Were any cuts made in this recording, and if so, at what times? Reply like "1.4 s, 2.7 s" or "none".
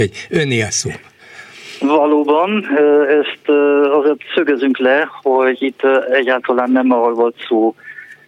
none